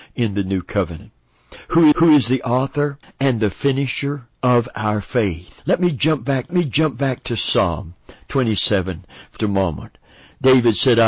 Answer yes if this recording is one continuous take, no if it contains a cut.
no